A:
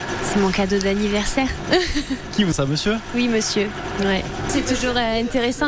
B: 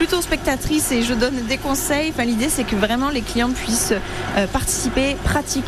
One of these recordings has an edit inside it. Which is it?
A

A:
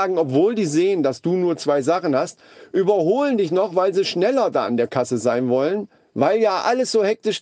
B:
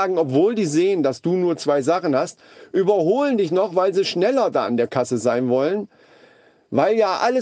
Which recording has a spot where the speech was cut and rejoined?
A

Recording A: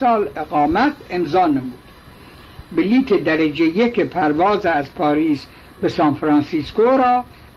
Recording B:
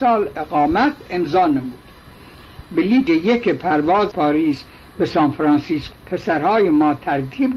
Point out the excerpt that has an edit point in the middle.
B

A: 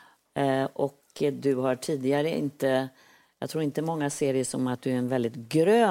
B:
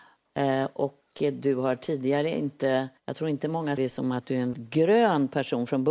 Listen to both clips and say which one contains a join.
B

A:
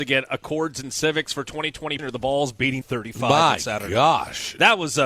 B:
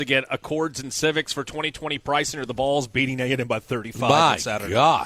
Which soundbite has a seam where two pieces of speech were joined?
A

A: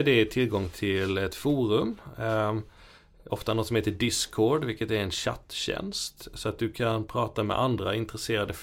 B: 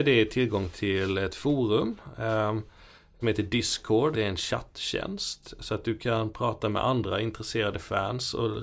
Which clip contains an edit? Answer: B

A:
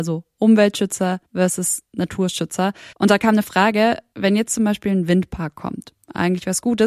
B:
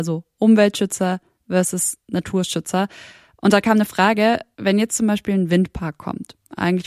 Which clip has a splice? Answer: A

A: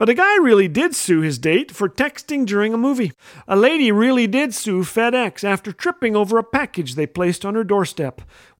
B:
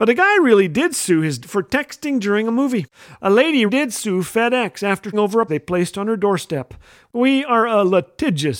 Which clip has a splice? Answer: B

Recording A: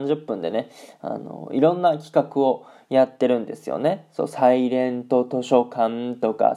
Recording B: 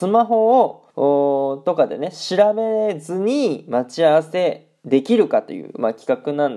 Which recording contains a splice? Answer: B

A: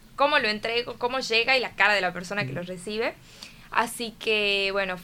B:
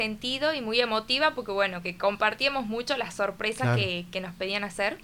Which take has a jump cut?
B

